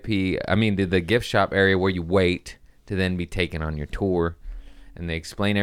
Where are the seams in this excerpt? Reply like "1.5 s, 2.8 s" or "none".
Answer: none